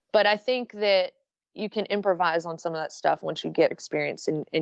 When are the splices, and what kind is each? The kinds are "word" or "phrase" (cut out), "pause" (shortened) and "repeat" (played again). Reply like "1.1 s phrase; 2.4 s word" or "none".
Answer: 3.7 s word